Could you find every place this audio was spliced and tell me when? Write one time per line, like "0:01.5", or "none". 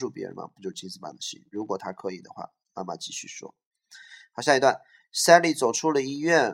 none